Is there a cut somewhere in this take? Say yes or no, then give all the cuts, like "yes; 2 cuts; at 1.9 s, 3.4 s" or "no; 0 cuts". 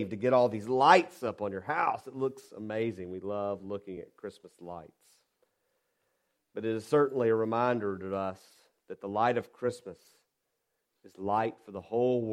no; 0 cuts